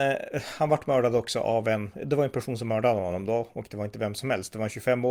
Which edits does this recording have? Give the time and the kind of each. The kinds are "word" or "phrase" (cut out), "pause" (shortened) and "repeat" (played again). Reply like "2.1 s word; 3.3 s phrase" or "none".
none